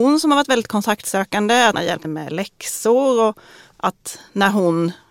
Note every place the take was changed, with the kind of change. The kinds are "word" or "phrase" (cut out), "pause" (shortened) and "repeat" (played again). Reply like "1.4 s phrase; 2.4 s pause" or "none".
1.7 s word; 2.0 s word